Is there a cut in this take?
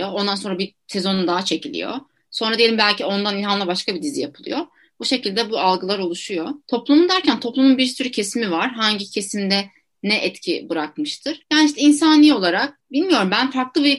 no; 0 cuts

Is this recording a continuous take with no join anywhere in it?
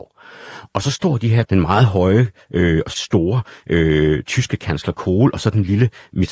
no; 2 cuts; at 1.5 s, 2.9 s

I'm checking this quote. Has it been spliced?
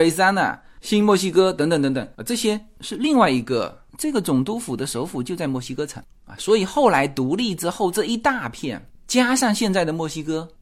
yes; 1 cut; at 2.1 s

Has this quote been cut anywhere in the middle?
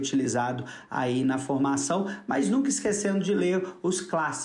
no; 0 cuts

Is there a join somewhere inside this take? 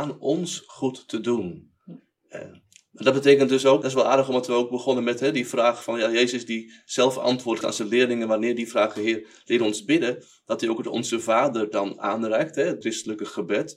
yes; 3 cuts; at 3.8 s, 7.6 s, 12.8 s

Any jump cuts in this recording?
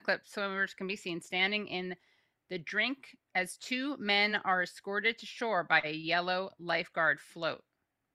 no; 0 cuts

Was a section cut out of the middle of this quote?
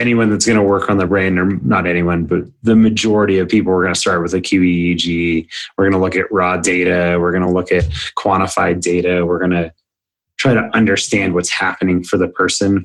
no; 0 cuts

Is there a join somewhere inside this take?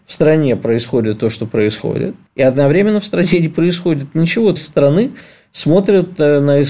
yes; 2 cuts; at 2.3 s, 4.6 s

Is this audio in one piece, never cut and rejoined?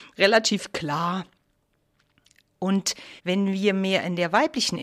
no; 1 cut; at 3.2 s

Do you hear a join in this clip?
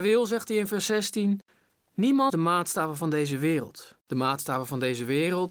yes; 2 cuts; at 2.3 s, 4.0 s

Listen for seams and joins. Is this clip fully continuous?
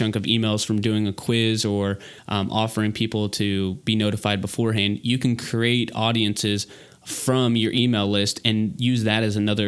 yes; 0 cuts

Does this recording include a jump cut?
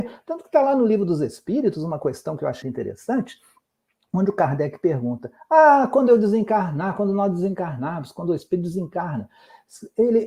yes; 1 cut; at 2.6 s

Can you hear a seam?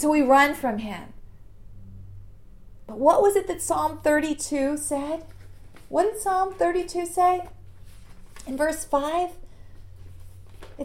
no; 0 cuts

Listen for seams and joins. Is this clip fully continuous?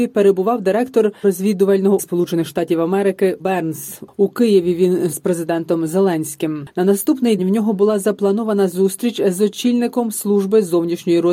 no; 5 cuts; at 1.2 s, 2.0 s, 3.4 s, 5.1 s, 7.4 s

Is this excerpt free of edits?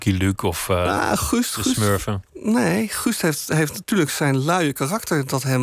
yes; 0 cuts

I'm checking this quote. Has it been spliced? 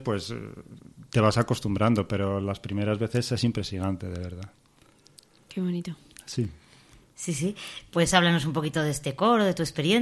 no; 0 cuts

